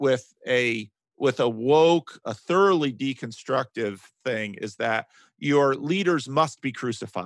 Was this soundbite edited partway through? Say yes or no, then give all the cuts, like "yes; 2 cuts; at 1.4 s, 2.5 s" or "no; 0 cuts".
yes; 1 cut; at 2.2 s